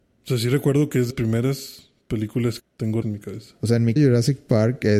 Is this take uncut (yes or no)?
no